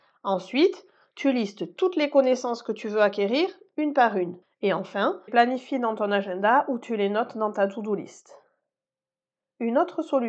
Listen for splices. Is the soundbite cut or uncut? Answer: cut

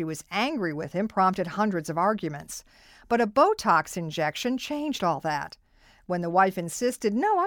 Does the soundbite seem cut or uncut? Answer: uncut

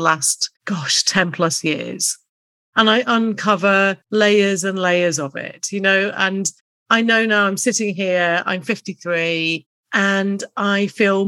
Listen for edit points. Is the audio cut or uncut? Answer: cut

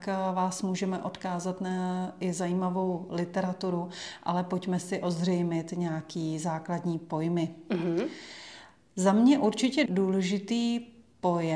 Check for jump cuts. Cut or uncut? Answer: cut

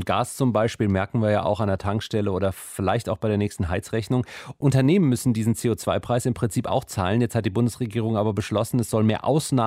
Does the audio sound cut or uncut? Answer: uncut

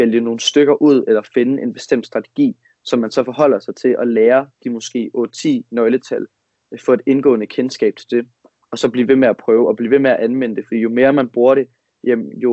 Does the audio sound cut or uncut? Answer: uncut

